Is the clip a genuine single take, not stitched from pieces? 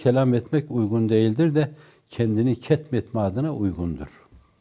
yes; 0 cuts

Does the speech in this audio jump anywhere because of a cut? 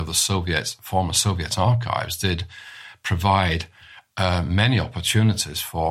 no; 0 cuts

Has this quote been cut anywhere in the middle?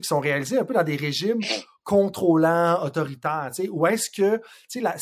no; 0 cuts

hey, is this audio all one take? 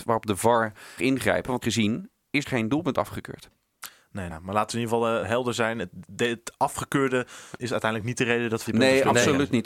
no; 7 cuts; at 1.0 s, 1.6 s, 2.4 s, 4.3 s, 5.2 s, 7.6 s, 8.6 s

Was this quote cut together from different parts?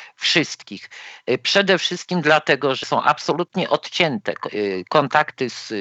yes; 1 cut; at 2.8 s

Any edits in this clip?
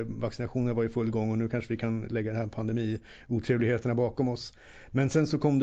no; 0 cuts

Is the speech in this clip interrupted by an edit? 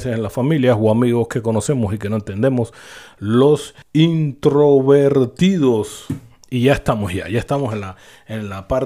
yes; 1 cut; at 3.8 s

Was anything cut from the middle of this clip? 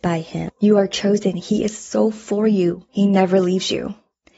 yes; 1 cut; at 2.9 s

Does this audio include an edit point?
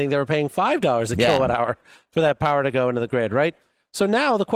no; 0 cuts

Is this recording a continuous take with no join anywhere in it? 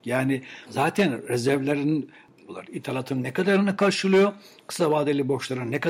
yes; 0 cuts

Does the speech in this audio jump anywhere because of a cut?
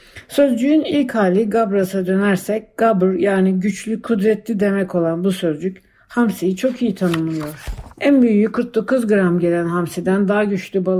yes; 1 cut; at 7.9 s

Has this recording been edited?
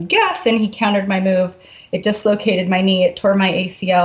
no; 0 cuts

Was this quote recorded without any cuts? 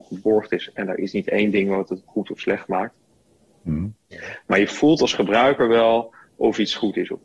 yes; 0 cuts

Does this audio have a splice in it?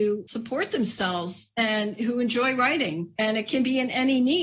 no; 0 cuts

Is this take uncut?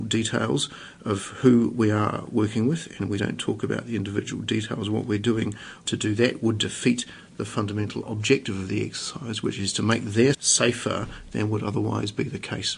no; 2 cuts; at 3.2 s, 10.3 s

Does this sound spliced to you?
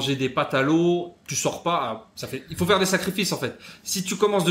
no; 0 cuts

